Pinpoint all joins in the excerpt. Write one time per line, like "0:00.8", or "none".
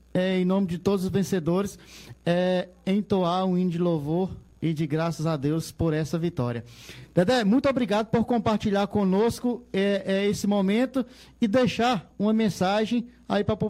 none

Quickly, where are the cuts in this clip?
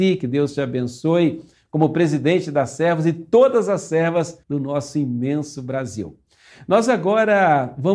0:04.4

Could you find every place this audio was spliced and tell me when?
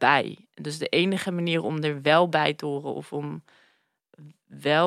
none

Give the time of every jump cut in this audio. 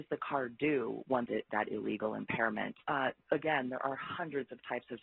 0:01.3
0:02.8

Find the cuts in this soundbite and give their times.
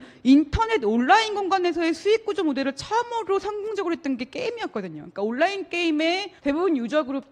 0:06.4

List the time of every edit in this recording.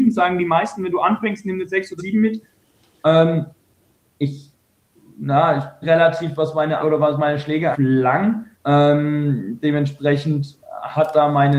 0:02.0
0:03.9
0:05.8
0:06.8
0:07.7
0:08.5

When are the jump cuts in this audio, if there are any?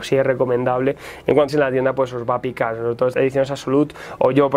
0:01.5
0:03.1

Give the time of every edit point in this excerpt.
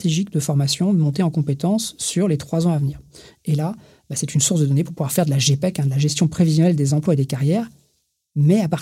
none

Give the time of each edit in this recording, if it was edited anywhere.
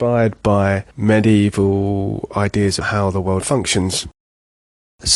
0:00.9
0:02.8
0:03.4

